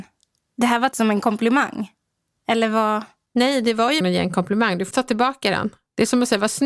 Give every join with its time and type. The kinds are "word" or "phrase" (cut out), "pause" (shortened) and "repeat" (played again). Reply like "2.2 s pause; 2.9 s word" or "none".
0.9 s word; 4.0 s word; 4.9 s word